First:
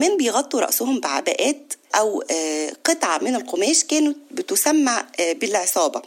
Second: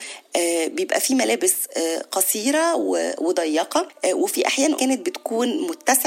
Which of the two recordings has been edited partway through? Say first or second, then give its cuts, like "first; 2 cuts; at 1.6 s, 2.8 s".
second; 1 cut; at 4.7 s